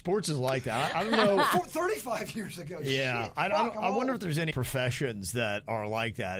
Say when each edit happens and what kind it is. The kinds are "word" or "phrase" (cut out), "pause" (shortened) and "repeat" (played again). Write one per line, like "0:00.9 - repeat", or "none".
0:04.5 - word